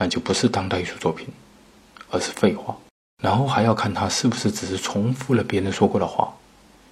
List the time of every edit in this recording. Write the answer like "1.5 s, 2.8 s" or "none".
2.9 s